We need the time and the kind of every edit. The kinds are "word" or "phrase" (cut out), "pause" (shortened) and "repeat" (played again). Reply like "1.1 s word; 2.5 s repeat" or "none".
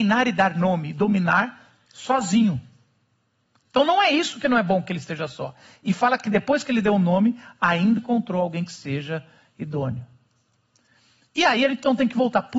8.0 s word